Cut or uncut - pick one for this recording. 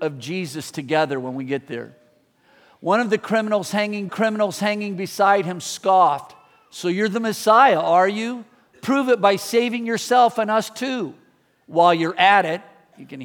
cut